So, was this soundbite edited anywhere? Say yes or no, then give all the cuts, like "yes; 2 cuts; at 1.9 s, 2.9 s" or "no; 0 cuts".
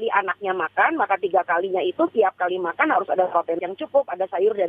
yes; 1 cut; at 3.6 s